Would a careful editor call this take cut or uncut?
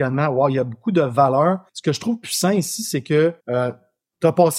cut